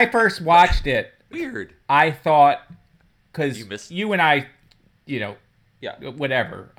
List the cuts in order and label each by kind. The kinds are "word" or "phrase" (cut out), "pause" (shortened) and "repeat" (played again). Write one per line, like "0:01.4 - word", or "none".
0:01.3 - word